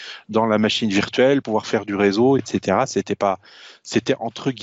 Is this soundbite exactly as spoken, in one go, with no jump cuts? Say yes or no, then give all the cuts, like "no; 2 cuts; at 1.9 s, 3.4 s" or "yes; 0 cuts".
no; 2 cuts; at 1.4 s, 2.4 s